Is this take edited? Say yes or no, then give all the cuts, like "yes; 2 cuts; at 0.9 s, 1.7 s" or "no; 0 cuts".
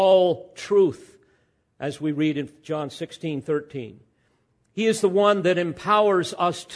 no; 0 cuts